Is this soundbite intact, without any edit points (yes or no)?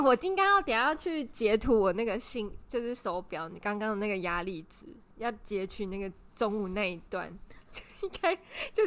yes